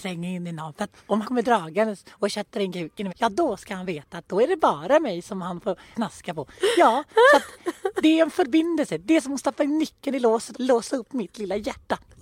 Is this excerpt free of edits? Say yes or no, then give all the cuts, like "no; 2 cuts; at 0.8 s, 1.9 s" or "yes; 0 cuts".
no; 4 cuts; at 1.2 s, 3.1 s, 5.9 s, 10.5 s